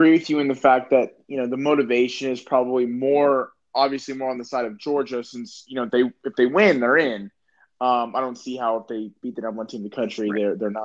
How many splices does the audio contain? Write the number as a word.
zero